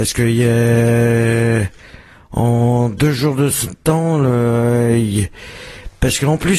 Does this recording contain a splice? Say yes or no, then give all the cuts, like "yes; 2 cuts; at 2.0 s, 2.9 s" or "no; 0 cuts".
no; 0 cuts